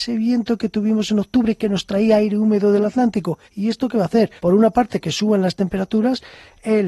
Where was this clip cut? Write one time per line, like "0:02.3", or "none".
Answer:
0:03.4
0:04.4